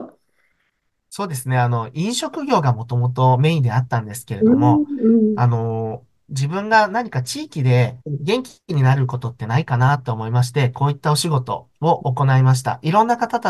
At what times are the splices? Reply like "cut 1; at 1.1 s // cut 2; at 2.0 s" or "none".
cut 1; at 8.0 s